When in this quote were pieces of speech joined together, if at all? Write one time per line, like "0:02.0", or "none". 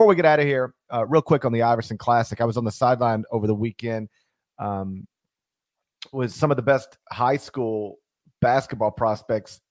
none